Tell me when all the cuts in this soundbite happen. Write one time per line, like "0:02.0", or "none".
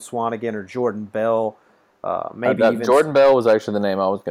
none